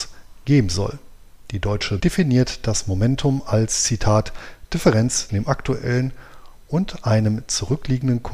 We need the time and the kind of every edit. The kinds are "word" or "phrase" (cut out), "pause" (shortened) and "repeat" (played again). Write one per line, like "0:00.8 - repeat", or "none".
0:02.0 - word
0:05.3 - word

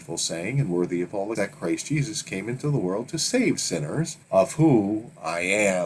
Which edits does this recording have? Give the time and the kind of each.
0:01.4 - word
0:04.2 - pause

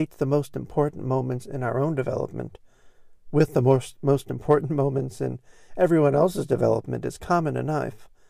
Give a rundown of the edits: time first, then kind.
none

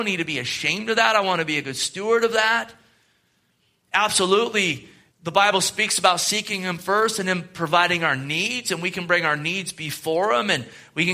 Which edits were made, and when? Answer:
0:05.1 - pause

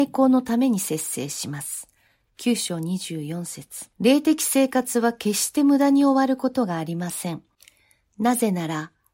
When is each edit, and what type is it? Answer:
0:03.9 - pause

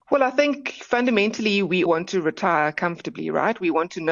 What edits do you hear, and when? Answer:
0:01.9 - word

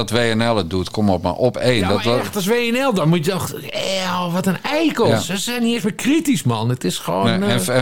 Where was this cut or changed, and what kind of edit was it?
none

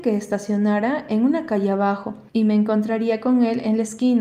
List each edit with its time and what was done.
0:02.3 - pause

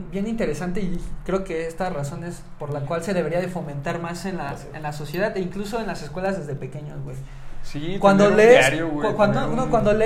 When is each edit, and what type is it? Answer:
none

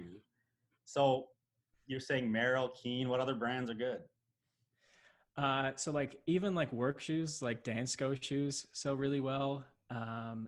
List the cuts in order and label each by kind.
none

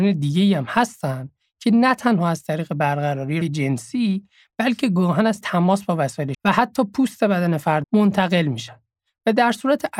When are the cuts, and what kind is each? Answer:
0:03.4 - word
0:05.4 - word
0:06.3 - word
0:07.8 - word

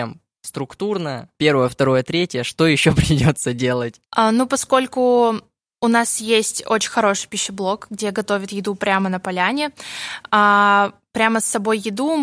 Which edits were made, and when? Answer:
0:01.3 - pause

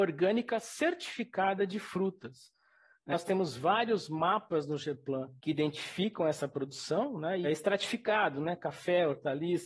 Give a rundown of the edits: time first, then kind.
0:03.1 - word
0:05.4 - pause
0:07.4 - phrase

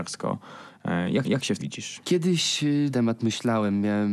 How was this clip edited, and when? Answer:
0:01.2 - repeat
0:01.6 - word
0:02.9 - phrase

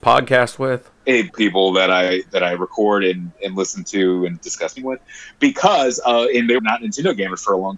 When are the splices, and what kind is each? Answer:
0:01.0 - pause
0:01.3 - word
0:04.8 - word
0:06.6 - word

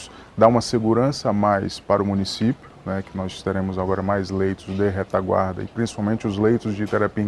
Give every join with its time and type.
none

